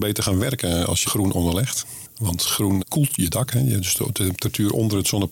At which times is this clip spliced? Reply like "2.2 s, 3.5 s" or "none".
1.1 s, 2.8 s